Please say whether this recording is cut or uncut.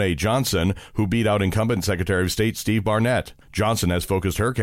cut